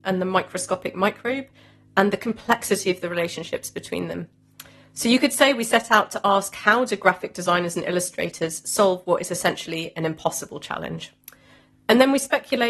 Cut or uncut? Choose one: uncut